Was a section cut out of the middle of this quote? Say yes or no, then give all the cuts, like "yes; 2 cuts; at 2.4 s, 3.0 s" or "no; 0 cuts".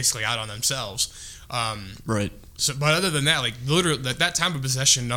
no; 0 cuts